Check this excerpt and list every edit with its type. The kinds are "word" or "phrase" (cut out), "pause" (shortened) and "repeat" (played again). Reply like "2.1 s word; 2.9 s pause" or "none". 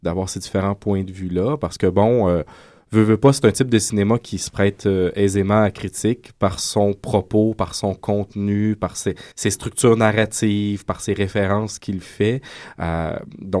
9.3 s pause

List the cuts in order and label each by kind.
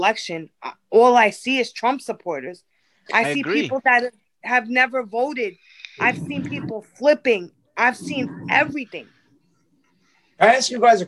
none

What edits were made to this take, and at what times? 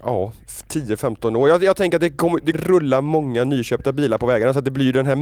2.5 s phrase

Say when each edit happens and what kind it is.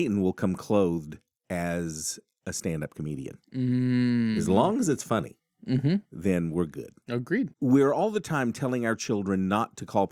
7.5 s pause

